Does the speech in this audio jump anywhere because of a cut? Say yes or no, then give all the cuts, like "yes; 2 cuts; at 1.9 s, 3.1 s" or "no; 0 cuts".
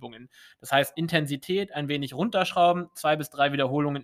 yes; 1 cut; at 0.9 s